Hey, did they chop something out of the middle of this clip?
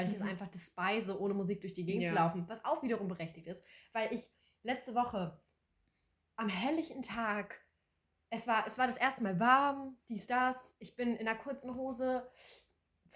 no; 0 cuts

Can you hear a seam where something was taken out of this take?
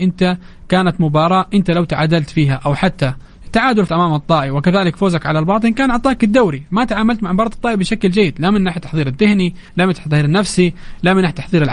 yes; 2 cuts; at 3.9 s, 9.7 s

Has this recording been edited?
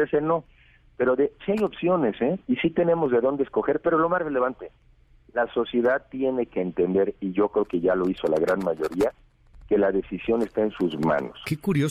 yes; 1 cut; at 1.4 s

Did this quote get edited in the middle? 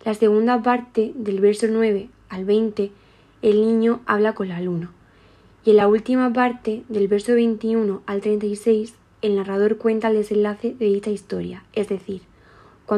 no; 0 cuts

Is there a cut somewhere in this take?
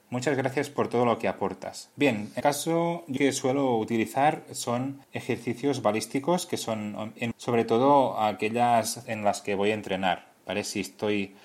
yes; 6 cuts; at 1.9 s, 2.4 s, 3.2 s, 5.0 s, 7.3 s, 9.0 s

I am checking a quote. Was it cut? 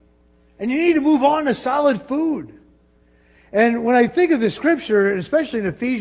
no; 0 cuts

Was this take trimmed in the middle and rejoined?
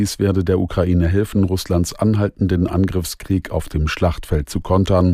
no; 0 cuts

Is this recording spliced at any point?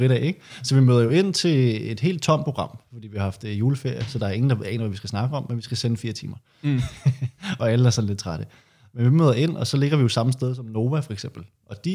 no; 0 cuts

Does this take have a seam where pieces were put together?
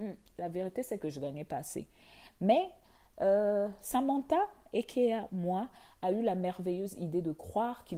no; 0 cuts

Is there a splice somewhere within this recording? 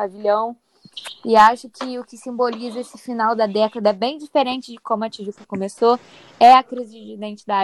no; 0 cuts

